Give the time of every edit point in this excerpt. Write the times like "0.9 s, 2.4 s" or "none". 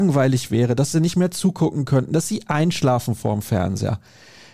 none

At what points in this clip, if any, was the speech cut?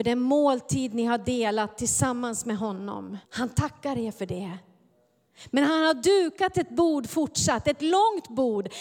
3.2 s

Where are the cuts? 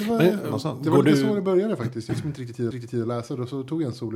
2.1 s, 2.7 s

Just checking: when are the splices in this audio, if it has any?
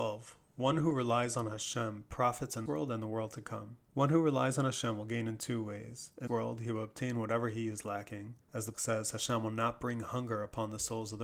2.7 s, 3.8 s, 6.3 s, 8.4 s, 8.7 s

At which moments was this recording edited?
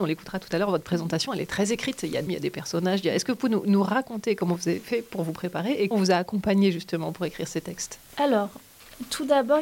2.3 s, 5.9 s, 8.1 s

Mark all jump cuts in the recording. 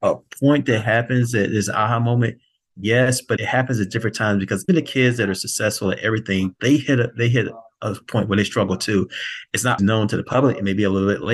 3.4 s, 4.7 s, 9.8 s

